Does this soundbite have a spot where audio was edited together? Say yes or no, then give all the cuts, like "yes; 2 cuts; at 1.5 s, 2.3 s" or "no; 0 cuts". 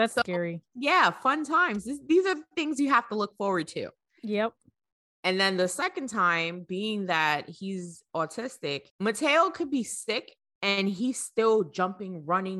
no; 0 cuts